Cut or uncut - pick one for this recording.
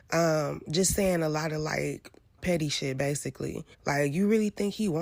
cut